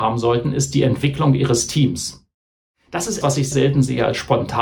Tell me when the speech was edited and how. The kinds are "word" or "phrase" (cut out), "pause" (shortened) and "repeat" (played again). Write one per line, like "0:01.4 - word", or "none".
0:03.2 - word
0:03.5 - word